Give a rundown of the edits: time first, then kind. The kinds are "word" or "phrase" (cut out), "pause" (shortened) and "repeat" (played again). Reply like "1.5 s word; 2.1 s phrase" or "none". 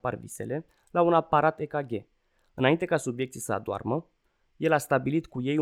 none